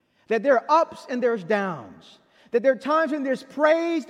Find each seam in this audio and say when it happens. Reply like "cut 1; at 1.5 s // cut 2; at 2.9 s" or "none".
none